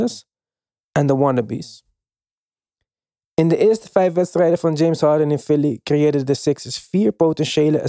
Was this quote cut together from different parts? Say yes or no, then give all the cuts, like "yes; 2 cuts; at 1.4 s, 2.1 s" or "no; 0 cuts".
no; 0 cuts